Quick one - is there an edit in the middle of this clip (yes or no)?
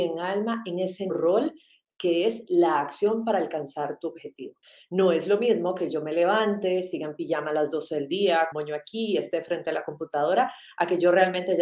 yes